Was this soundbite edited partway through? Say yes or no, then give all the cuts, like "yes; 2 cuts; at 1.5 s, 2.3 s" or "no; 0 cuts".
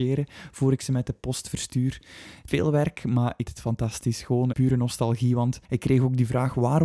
yes; 4 cuts; at 2.5 s, 3.5 s, 4.5 s, 5.7 s